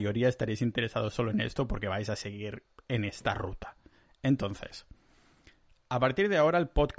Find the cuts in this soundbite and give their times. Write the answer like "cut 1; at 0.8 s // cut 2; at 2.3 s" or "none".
none